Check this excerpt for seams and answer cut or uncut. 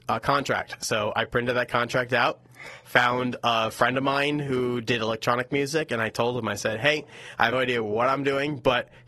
cut